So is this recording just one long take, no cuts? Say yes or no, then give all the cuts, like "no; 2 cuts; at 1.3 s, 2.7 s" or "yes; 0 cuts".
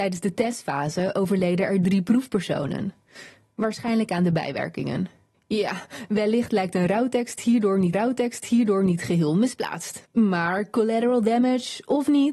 no; 2 cuts; at 7.9 s, 10.1 s